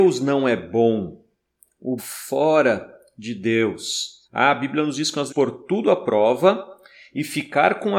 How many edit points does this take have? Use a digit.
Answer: 3